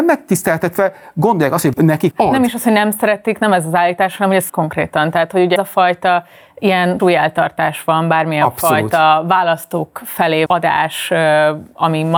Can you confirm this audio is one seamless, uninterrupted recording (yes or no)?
no